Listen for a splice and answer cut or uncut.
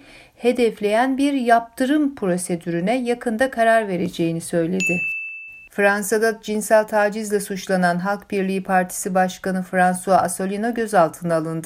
uncut